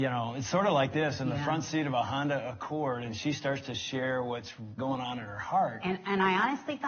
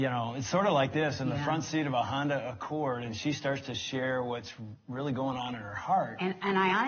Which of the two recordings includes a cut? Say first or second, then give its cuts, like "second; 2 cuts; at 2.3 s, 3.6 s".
first; 1 cut; at 4.8 s